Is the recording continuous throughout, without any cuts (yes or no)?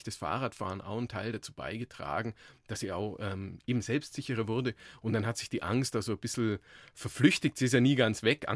yes